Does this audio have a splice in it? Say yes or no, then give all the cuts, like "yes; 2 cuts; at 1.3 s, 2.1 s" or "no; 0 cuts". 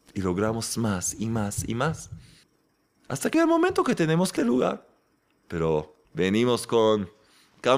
yes; 4 cuts; at 2.4 s, 3.3 s, 4.4 s, 6.0 s